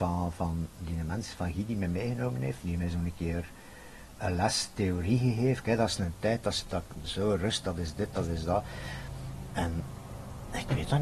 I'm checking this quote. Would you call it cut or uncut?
uncut